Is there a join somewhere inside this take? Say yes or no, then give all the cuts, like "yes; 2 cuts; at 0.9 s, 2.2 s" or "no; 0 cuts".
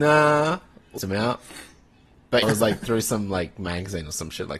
yes; 2 cuts; at 1.0 s, 2.4 s